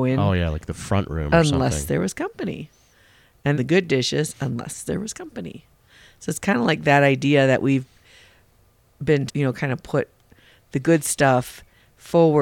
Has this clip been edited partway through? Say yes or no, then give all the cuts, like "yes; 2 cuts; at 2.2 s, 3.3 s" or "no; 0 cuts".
yes; 2 cuts; at 3.5 s, 9.3 s